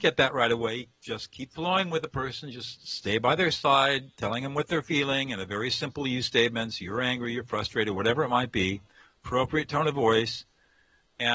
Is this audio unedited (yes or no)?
yes